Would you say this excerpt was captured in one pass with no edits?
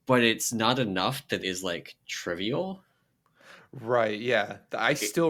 no; 1 cut; at 1.4 s

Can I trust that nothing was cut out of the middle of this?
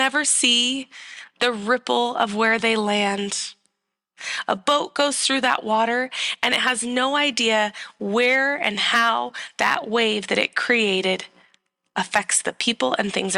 yes; 0 cuts

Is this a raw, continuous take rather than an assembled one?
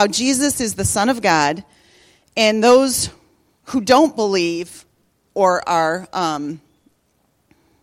yes; 0 cuts

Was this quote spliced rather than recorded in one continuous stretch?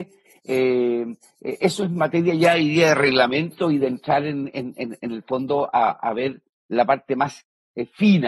no; 0 cuts

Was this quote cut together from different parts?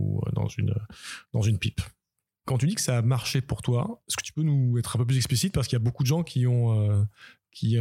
no; 0 cuts

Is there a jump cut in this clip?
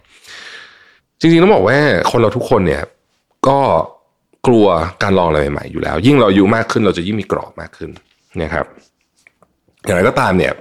yes; 1 cut; at 1.0 s

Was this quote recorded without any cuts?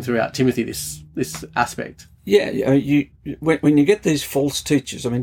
yes; 0 cuts

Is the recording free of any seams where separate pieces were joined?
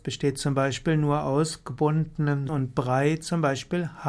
no; 1 cut; at 2.5 s

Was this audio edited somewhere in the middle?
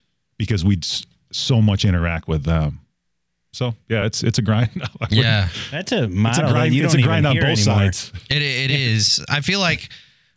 no; 0 cuts

